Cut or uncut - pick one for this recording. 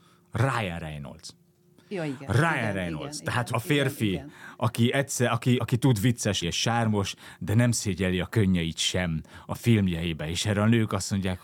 cut